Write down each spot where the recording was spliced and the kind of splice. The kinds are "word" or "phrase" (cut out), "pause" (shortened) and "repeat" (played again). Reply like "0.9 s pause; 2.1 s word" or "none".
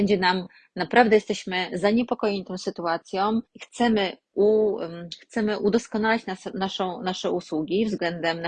3.5 s pause